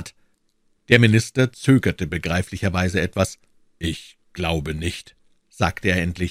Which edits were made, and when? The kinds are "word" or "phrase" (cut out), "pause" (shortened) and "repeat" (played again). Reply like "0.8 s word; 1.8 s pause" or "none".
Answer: none